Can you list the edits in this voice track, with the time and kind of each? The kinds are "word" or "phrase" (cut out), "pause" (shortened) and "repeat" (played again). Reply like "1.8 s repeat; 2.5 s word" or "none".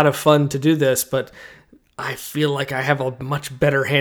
none